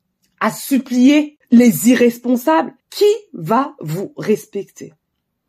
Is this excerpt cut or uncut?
cut